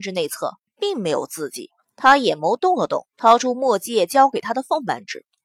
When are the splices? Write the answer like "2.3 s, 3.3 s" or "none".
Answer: 1.8 s, 3.1 s

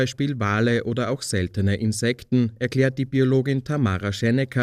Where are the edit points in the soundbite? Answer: none

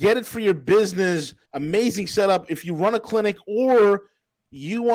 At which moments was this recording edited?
1.4 s

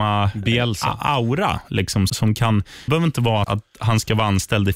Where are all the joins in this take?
2.1 s, 2.9 s, 3.4 s

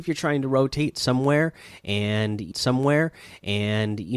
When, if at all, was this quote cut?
2.5 s

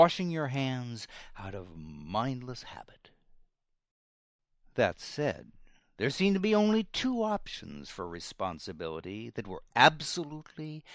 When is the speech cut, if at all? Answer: none

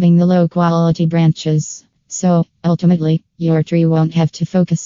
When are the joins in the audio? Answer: none

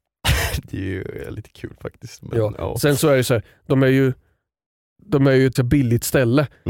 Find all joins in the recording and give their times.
5.6 s

